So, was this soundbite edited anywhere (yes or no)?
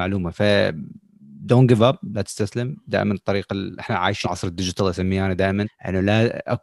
yes